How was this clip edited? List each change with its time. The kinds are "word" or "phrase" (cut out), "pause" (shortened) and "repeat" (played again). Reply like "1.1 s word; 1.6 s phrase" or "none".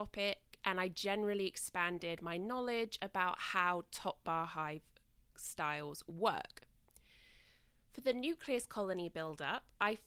none